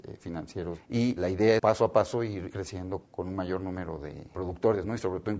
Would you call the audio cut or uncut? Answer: cut